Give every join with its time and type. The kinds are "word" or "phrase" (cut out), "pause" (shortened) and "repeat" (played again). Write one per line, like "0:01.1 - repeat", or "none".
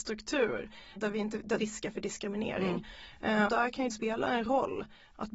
0:01.0 - word
0:01.6 - phrase
0:03.5 - word
0:03.9 - word